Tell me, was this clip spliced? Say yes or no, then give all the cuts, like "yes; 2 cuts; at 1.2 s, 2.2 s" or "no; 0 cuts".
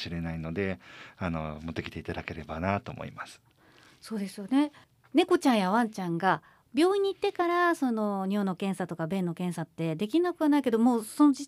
no; 0 cuts